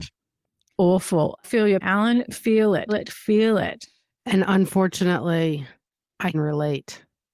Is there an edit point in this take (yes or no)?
yes